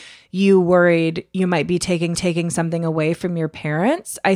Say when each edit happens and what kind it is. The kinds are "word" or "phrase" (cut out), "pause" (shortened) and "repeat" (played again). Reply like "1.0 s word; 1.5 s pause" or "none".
2.1 s repeat